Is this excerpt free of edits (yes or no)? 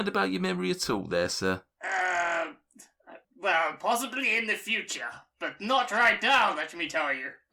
no